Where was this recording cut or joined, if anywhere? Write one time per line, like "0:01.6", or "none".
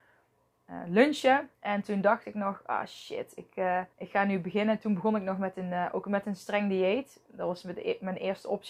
0:01.5
0:03.9